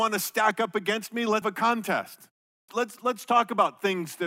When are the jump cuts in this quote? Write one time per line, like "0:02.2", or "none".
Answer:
0:01.4
0:02.7